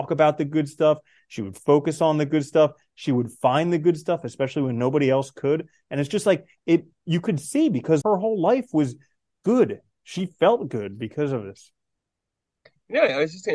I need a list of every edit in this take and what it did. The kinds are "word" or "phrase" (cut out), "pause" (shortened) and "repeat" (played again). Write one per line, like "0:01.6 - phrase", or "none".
0:08.0 - word